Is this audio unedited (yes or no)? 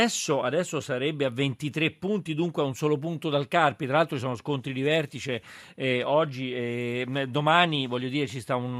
yes